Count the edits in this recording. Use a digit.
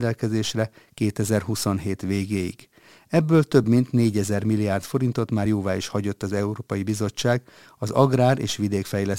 0